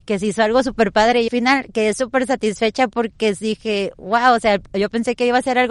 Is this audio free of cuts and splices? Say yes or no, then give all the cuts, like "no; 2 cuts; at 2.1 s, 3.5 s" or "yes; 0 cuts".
no; 1 cut; at 1.3 s